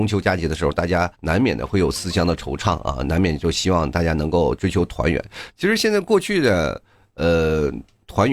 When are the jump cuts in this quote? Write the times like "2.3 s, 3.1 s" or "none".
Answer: 1.1 s